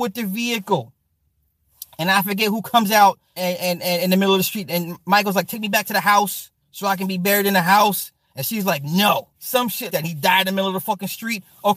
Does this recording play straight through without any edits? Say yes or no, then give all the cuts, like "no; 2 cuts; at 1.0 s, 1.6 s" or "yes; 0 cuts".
no; 4 cuts; at 3.4 s, 6.6 s, 9.3 s, 9.9 s